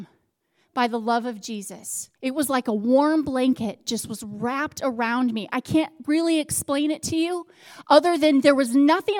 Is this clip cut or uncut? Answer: cut